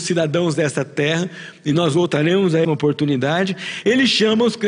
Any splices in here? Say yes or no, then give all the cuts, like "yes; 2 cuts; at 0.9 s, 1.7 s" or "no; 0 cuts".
yes; 1 cut; at 2.6 s